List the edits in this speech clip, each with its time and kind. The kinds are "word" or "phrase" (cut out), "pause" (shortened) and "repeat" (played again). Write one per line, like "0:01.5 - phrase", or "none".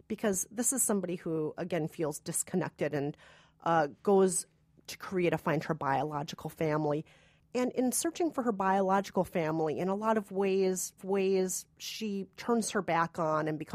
0:11.0 - repeat